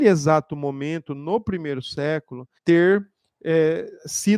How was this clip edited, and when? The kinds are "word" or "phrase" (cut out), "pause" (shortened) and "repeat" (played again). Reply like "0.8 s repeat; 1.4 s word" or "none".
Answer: 2.6 s pause